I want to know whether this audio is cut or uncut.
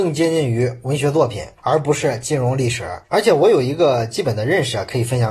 cut